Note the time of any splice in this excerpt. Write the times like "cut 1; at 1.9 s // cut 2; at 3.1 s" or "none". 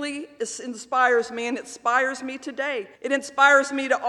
cut 1; at 3.0 s